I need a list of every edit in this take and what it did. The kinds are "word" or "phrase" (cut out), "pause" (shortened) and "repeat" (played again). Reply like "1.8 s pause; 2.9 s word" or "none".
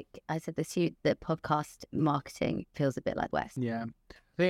0.9 s word; 3.3 s word